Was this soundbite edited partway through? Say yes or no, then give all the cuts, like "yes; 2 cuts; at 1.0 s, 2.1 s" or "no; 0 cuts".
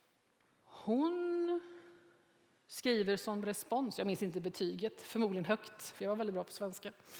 no; 0 cuts